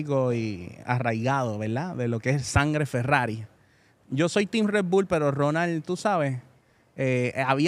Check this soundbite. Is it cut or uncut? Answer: uncut